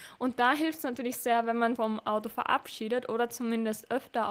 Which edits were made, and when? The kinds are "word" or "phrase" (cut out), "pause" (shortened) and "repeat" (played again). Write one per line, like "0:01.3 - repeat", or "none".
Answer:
0:01.8 - word